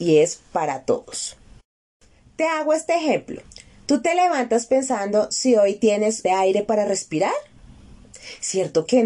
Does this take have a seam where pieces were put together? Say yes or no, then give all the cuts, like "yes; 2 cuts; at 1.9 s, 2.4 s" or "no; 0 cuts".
yes; 1 cut; at 6.2 s